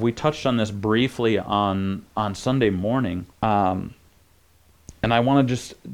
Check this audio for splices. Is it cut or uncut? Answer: cut